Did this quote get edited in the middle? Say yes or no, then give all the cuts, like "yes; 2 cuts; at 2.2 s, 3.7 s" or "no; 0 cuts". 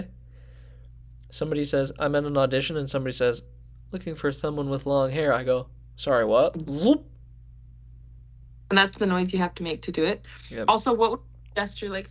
no; 0 cuts